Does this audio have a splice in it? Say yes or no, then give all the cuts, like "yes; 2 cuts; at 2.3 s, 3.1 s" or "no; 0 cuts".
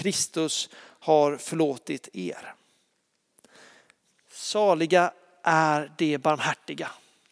no; 0 cuts